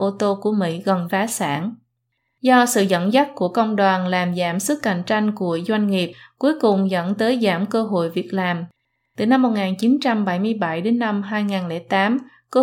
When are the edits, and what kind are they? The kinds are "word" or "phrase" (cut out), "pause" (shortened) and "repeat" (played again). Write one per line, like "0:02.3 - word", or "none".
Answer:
0:01.1 - word